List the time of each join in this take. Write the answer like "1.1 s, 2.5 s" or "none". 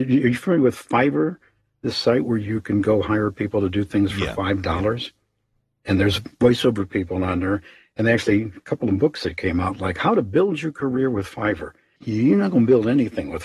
none